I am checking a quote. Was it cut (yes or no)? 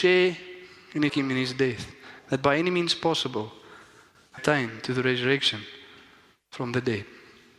yes